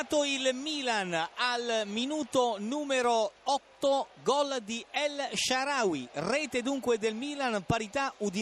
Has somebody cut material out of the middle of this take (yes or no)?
no